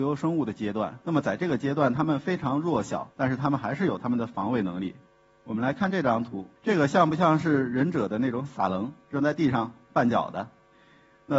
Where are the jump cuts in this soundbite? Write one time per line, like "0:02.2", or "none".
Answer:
0:01.0
0:03.1
0:05.1
0:06.6